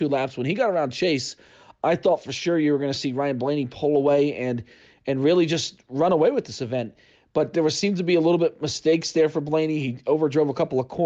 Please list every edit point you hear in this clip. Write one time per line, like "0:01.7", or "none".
none